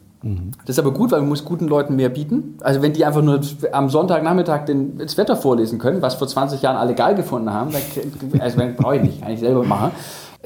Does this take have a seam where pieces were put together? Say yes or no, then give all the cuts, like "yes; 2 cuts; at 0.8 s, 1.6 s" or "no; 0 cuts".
no; 0 cuts